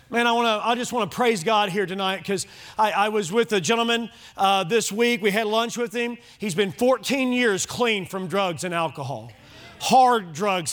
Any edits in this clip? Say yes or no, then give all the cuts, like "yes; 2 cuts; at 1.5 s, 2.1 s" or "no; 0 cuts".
no; 0 cuts